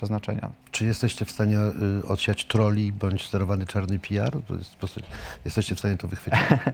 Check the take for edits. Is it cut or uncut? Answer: uncut